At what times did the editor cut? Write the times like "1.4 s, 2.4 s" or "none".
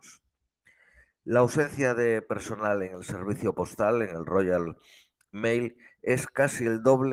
none